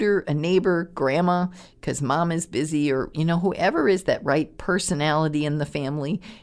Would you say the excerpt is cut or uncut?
uncut